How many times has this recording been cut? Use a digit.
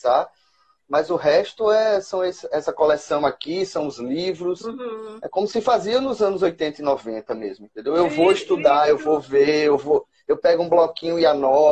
0